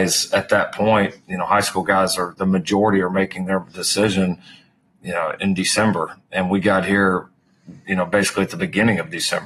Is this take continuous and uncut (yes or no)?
yes